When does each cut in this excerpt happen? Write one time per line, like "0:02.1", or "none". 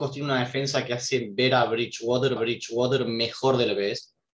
0:02.4